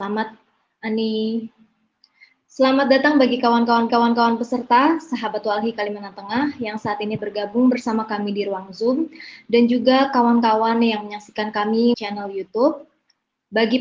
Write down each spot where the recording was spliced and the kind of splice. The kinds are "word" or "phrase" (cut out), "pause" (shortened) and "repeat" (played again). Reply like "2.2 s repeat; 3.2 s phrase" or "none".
3.9 s repeat; 7.2 s word; 11.9 s word